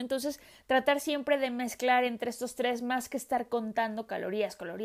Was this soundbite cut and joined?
no; 0 cuts

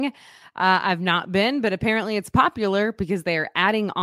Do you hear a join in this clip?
no; 0 cuts

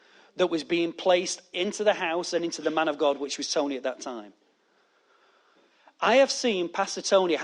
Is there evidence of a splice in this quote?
no; 0 cuts

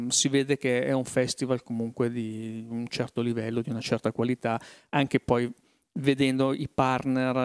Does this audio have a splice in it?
no; 0 cuts

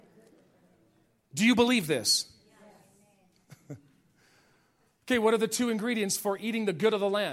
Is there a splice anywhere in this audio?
no; 0 cuts

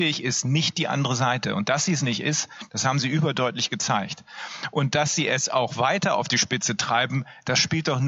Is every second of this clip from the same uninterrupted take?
yes; 0 cuts

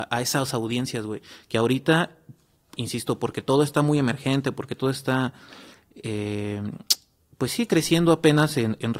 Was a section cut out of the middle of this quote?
no; 0 cuts

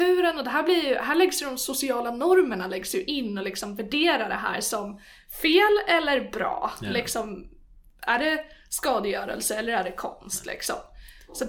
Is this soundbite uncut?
yes; 0 cuts

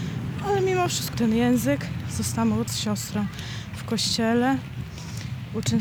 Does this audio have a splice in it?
yes; 2 cuts; at 1.1 s, 2.7 s

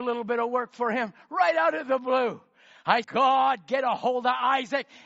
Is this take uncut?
no; 1 cut; at 3.0 s

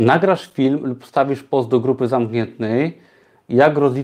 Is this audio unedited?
yes; 0 cuts

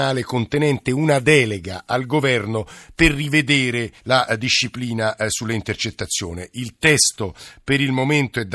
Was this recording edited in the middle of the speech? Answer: yes; 1 cut; at 4.0 s

